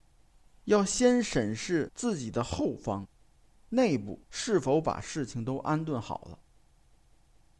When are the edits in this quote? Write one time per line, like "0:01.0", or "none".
0:04.2